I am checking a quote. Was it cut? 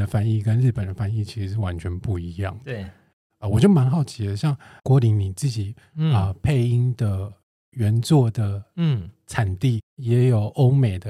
no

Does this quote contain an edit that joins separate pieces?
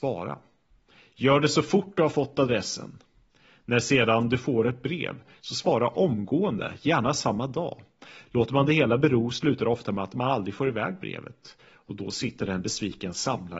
no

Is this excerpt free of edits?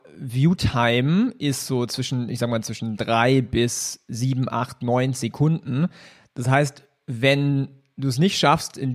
yes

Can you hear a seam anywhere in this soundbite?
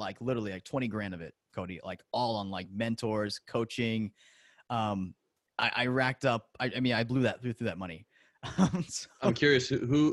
no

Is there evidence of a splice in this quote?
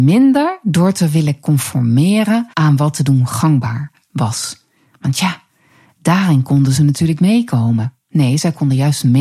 yes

